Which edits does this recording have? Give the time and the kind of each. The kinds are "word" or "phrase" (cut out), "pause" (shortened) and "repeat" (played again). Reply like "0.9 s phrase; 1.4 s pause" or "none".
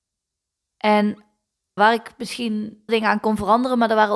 1.8 s word; 2.9 s word